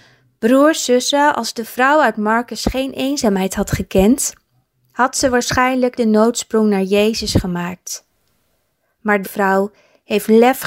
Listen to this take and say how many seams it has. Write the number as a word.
two